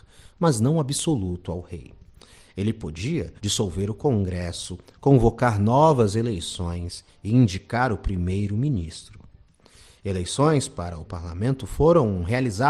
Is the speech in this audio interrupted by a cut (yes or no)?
yes